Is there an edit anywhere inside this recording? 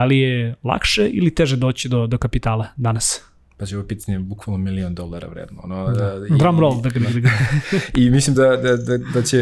no; 0 cuts

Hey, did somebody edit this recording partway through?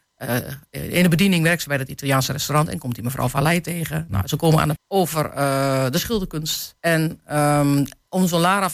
yes; 2 cuts; at 4.8 s, 6.8 s

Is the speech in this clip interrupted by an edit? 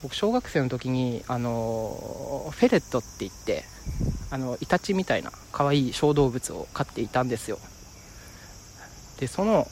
yes; 1 cut; at 5.4 s

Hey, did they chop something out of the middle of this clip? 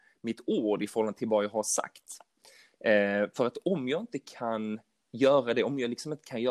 no; 0 cuts

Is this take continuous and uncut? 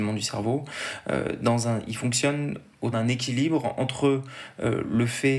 no; 1 cut; at 2.9 s

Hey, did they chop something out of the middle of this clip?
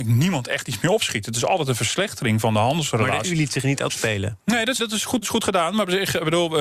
yes; 4 cuts; at 3.2 s, 3.9 s, 4.8 s, 5.2 s

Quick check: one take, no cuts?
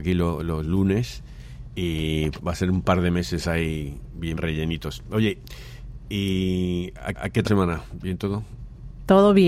no; 4 cuts; at 2.4 s, 4.4 s, 7.1 s, 7.5 s

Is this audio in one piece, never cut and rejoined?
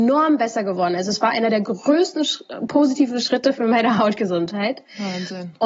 yes; 0 cuts

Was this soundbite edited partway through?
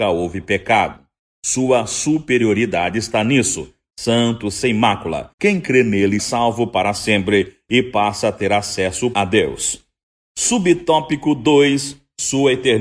yes; 4 cuts; at 4.4 s, 5.3 s, 6.2 s, 9.1 s

